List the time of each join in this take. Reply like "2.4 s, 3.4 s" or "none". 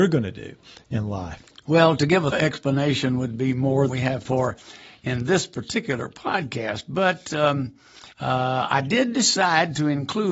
2.3 s, 3.9 s, 4.2 s, 8.1 s